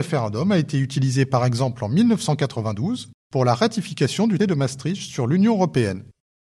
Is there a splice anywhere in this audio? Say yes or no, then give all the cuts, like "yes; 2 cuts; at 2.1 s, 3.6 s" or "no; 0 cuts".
yes; 1 cut; at 4.4 s